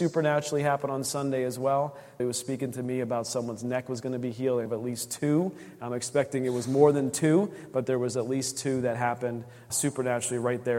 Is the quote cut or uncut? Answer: cut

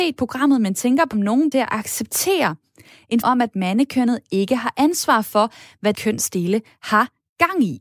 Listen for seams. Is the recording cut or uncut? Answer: cut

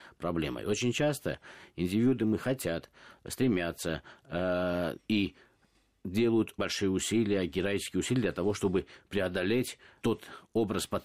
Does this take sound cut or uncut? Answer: cut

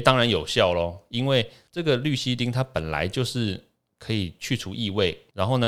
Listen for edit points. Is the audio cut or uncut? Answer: uncut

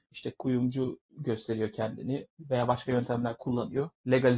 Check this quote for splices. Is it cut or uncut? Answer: uncut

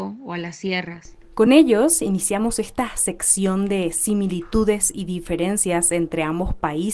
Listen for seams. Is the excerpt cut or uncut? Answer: uncut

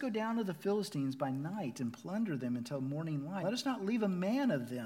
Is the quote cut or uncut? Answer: cut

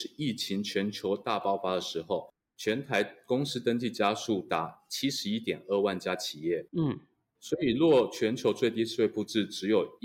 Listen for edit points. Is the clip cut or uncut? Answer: uncut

